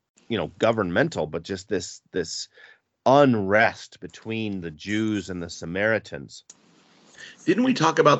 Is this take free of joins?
yes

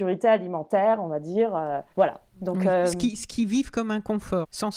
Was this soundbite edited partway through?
yes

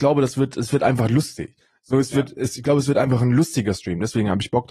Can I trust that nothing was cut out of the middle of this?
yes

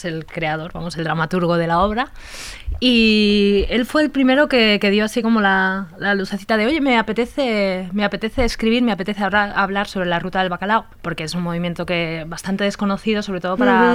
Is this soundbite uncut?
no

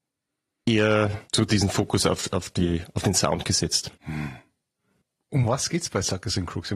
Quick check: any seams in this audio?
yes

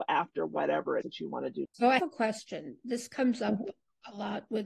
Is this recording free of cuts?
no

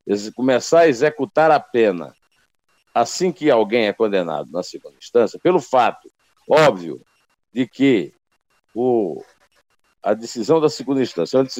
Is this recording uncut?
yes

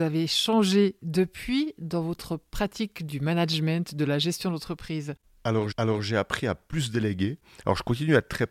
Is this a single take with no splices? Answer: no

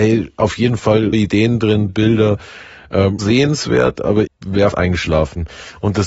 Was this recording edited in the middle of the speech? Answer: yes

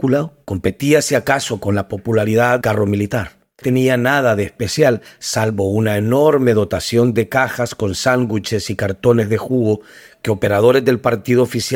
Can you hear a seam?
yes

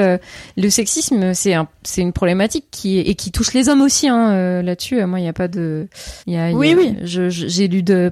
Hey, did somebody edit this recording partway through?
yes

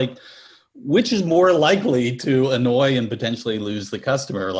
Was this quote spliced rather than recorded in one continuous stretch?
no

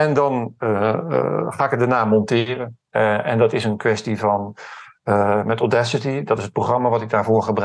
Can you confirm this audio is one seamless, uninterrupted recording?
yes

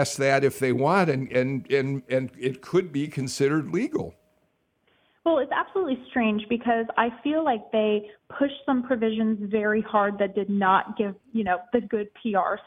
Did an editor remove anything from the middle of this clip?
no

